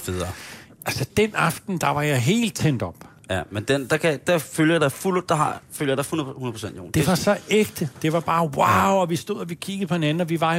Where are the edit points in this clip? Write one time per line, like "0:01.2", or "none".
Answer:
0:01.1